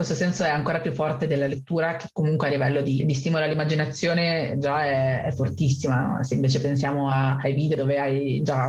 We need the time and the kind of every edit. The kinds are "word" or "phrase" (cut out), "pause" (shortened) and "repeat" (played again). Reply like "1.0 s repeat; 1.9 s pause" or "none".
none